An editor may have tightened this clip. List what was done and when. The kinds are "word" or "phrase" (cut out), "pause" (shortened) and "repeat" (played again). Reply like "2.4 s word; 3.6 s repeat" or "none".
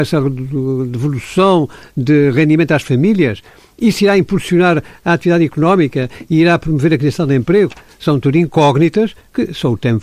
none